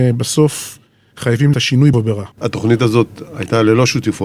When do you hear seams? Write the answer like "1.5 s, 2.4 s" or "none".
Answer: 1.5 s, 1.9 s, 2.3 s